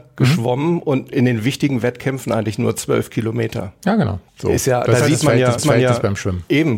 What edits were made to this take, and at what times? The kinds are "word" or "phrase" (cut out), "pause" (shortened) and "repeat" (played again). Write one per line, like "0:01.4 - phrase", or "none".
0:04.3 - pause
0:05.6 - repeat